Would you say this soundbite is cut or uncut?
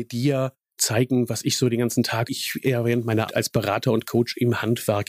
cut